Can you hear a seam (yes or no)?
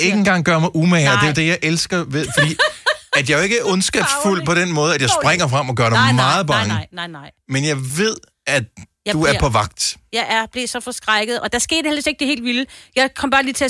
no